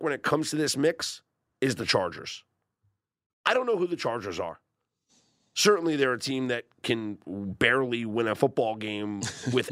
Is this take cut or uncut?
uncut